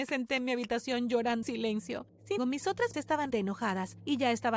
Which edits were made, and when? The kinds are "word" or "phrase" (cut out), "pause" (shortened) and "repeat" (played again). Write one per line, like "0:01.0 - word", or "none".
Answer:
0:01.4 - word
0:02.4 - word
0:02.9 - word
0:03.3 - word